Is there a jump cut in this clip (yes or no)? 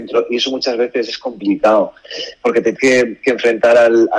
yes